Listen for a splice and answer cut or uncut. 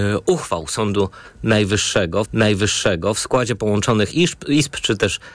cut